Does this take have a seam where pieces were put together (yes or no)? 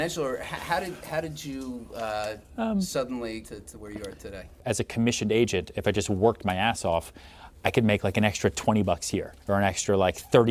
yes